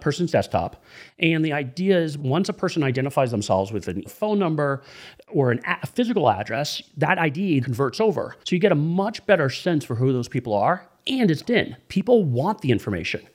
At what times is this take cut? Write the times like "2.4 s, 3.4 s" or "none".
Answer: 2.2 s, 4.1 s, 7.6 s, 8.4 s, 11.4 s